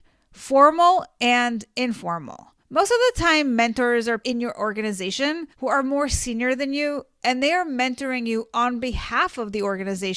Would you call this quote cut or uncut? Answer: cut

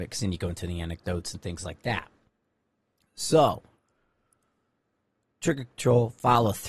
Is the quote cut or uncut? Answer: uncut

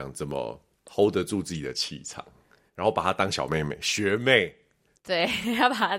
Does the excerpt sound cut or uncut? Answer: uncut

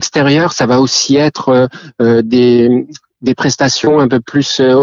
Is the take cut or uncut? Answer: uncut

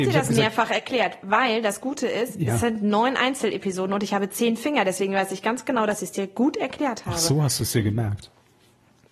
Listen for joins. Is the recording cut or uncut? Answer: uncut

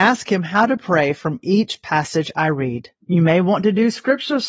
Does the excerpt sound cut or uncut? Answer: uncut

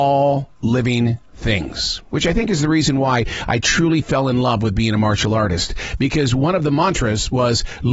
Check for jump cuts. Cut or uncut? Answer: uncut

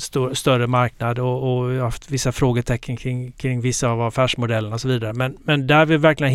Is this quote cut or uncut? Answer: uncut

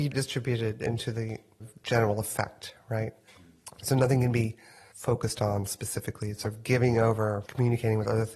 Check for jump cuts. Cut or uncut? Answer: cut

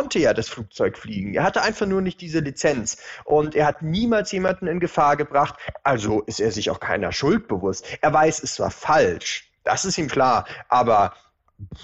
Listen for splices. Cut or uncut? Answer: cut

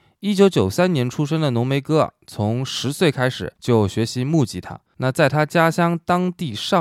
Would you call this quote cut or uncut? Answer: cut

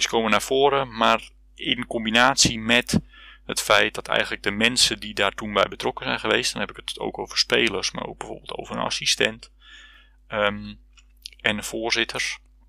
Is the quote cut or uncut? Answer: uncut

